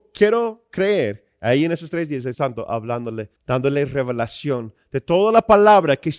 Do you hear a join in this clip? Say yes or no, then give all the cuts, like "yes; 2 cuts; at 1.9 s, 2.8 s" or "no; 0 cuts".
yes; 2 cuts; at 2.3 s, 3.4 s